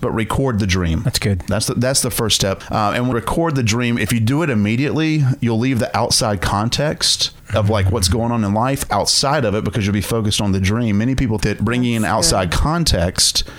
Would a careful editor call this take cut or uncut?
cut